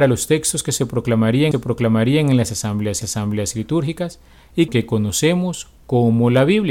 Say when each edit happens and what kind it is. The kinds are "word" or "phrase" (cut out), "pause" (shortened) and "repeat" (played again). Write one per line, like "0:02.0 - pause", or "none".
0:01.5 - repeat
0:03.0 - repeat
0:04.7 - phrase